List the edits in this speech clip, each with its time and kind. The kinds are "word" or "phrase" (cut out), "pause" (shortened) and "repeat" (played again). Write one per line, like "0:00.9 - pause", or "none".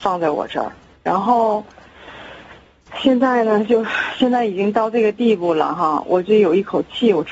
0:01.0 - word